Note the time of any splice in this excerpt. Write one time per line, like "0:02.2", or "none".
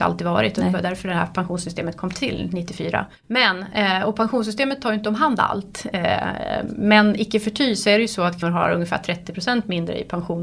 0:03.2
0:08.4